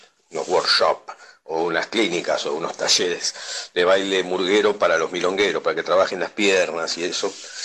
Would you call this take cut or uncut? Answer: uncut